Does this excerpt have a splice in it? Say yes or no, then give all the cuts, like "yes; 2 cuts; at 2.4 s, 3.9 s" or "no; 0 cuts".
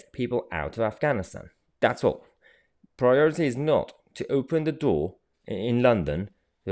no; 0 cuts